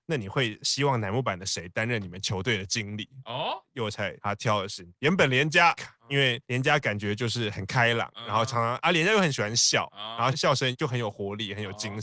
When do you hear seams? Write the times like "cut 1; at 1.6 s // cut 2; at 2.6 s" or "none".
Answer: cut 1; at 5.8 s